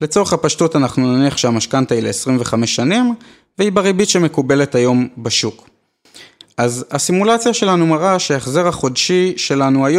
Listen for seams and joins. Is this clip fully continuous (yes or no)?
yes